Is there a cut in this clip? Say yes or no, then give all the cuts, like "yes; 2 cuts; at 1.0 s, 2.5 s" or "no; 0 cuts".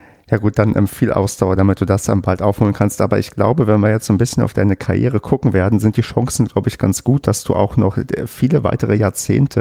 no; 0 cuts